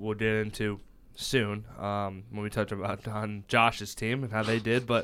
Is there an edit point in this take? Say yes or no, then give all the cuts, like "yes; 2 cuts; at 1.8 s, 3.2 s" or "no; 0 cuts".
no; 0 cuts